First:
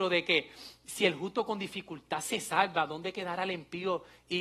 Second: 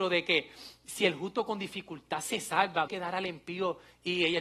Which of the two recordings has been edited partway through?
second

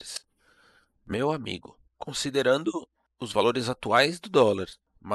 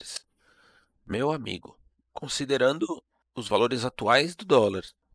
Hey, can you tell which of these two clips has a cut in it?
first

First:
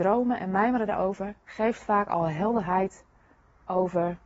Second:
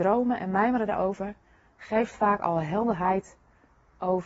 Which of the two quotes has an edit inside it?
first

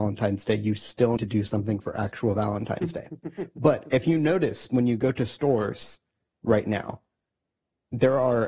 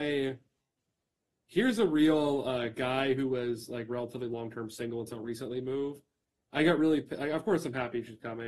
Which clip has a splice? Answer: first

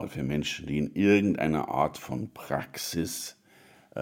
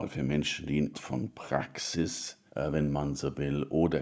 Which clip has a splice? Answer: second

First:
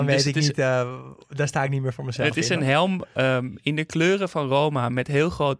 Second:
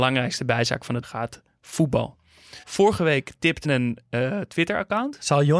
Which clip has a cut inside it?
second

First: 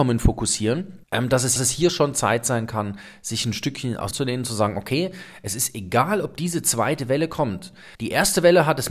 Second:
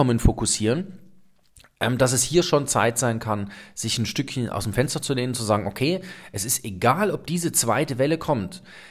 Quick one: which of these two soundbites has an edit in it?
first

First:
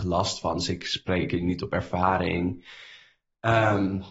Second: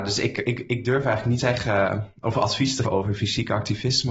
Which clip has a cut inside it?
second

